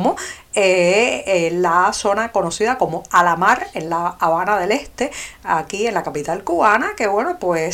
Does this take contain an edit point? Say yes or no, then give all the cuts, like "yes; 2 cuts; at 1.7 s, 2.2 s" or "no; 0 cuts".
no; 0 cuts